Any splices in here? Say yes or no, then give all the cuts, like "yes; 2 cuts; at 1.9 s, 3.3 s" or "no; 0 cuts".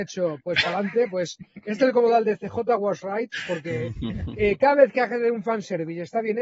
no; 0 cuts